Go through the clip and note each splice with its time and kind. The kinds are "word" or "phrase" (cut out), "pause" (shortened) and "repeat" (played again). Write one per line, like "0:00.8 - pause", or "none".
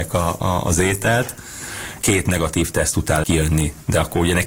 0:02.0 - word
0:03.2 - word